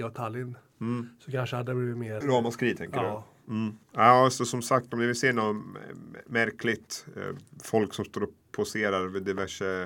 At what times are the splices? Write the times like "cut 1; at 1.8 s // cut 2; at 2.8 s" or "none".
cut 1; at 2.2 s // cut 2; at 3.8 s